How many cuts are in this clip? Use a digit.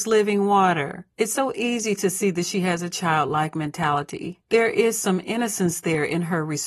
2